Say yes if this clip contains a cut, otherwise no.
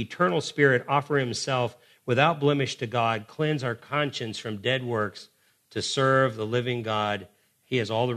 no